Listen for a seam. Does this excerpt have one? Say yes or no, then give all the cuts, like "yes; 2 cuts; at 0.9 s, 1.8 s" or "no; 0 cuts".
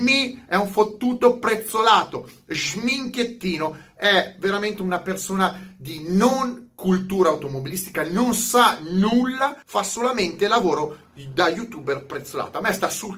yes; 1 cut; at 9.6 s